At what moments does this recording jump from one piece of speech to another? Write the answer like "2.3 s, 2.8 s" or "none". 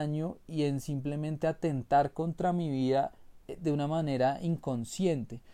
3.4 s